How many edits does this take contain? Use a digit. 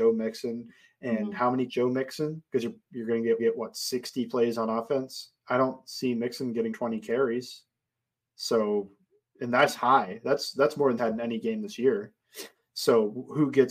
6